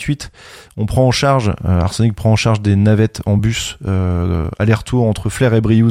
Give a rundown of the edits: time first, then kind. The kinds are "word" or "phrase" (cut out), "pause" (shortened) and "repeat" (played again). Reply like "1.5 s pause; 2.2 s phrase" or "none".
none